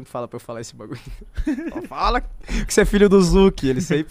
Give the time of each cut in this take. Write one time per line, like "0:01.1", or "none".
0:02.7

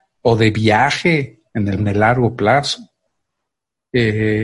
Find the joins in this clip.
0:01.5
0:01.8

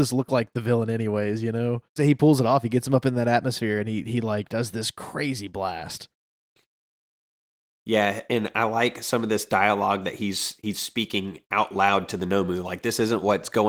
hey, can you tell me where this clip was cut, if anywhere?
none

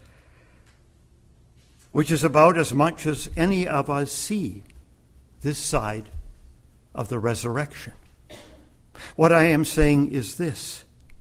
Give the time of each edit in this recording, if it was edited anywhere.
none

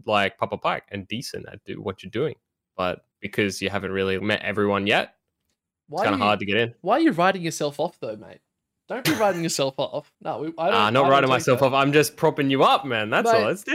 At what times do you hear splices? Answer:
0:03.1
0:04.2
0:10.1

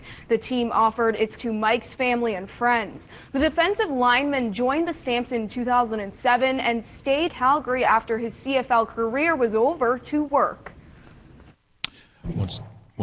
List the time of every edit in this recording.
0:01.4
0:07.3

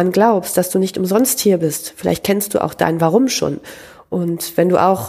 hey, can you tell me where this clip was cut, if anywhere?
none

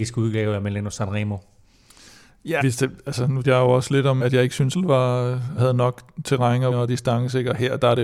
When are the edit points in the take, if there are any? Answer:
0:02.6
0:03.4
0:04.2
0:04.7
0:05.6
0:06.7

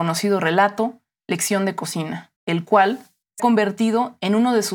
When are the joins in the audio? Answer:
0:02.4
0:03.4

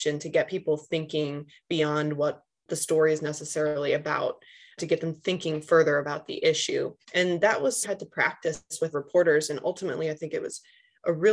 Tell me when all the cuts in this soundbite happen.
0:07.0
0:07.8
0:08.9

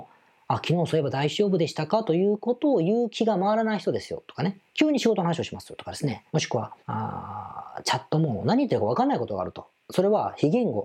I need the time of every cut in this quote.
0:04.7
0:06.3
0:06.8

